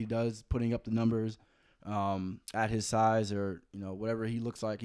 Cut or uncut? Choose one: cut